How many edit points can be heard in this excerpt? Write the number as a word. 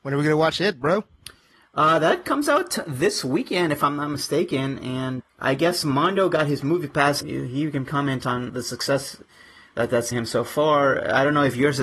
five